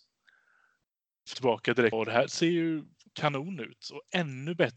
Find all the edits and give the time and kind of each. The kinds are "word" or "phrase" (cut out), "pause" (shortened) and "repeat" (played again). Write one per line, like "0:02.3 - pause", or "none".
0:01.3 - phrase
0:01.9 - word
0:03.1 - word